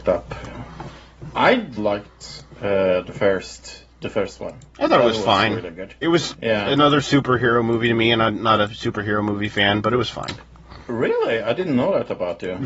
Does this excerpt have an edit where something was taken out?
yes; 1 cut; at 1.8 s

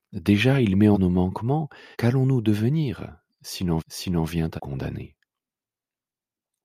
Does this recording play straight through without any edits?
no; 4 cuts; at 0.9 s, 1.9 s, 3.8 s, 4.6 s

